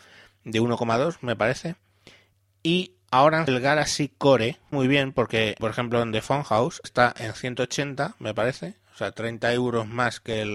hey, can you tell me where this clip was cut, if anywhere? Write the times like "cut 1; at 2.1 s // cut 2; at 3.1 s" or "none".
cut 1; at 3.5 s // cut 2; at 4.7 s // cut 3; at 5.6 s // cut 4; at 6.8 s